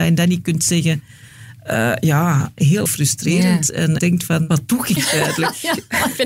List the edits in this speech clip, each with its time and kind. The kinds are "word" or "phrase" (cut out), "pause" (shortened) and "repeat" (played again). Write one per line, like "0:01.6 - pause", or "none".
0:02.9 - phrase
0:04.0 - phrase
0:05.0 - word